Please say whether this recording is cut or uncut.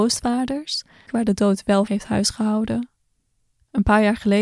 cut